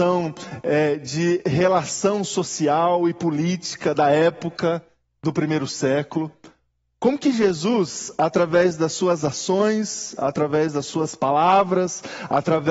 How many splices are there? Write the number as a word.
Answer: zero